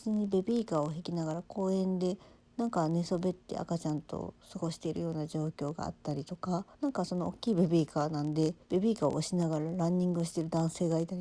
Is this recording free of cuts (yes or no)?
no